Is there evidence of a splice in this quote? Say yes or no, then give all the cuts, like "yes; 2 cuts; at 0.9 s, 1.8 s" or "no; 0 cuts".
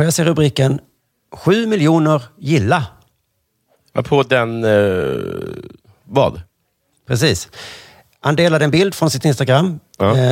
no; 0 cuts